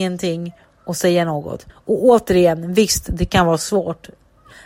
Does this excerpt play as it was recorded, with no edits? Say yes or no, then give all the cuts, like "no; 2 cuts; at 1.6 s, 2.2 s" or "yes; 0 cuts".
no; 1 cut; at 1.7 s